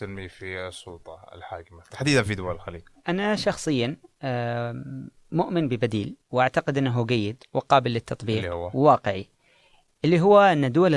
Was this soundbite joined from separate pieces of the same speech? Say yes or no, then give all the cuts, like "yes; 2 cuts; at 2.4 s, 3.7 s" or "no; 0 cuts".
yes; 1 cut; at 6.2 s